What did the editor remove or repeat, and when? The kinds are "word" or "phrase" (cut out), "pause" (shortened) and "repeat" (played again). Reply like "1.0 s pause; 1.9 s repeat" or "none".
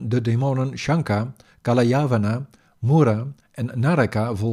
none